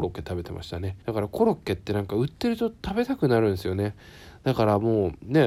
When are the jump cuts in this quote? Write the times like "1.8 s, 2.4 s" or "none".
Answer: 1.0 s